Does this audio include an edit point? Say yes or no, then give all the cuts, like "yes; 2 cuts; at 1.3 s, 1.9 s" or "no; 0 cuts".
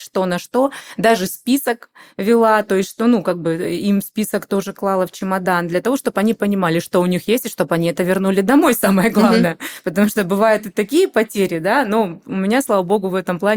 no; 0 cuts